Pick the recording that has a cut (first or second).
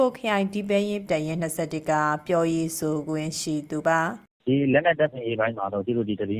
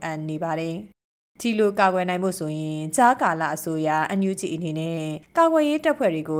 first